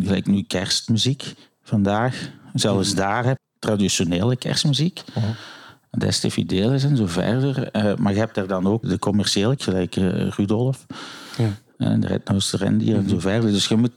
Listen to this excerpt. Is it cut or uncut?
cut